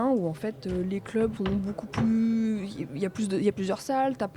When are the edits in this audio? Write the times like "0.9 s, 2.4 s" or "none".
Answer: 1.4 s